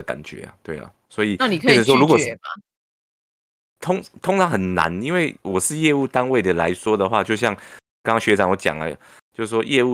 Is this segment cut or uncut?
uncut